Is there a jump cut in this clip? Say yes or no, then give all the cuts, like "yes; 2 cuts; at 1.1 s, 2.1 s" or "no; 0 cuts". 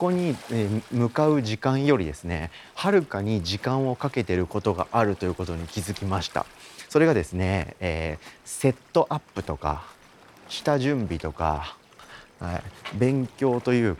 no; 0 cuts